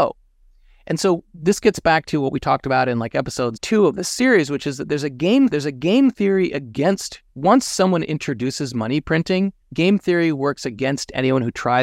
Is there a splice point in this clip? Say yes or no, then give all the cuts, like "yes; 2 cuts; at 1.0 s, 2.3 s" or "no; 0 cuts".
yes; 4 cuts; at 3.6 s, 5.5 s, 7.3 s, 9.6 s